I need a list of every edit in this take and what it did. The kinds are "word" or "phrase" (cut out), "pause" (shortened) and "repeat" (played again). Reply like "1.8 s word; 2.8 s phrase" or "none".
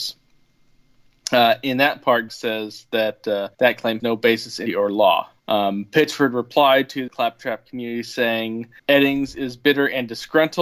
2.3 s word; 3.5 s pause; 4.0 s word; 4.7 s word; 5.4 s pause; 7.1 s word; 8.8 s pause